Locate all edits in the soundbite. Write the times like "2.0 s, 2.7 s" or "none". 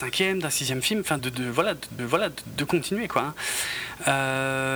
1.2 s, 2.0 s